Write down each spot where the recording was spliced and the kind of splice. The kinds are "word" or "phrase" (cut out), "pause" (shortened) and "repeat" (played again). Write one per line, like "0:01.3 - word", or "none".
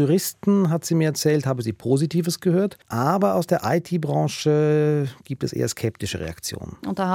0:02.8 - pause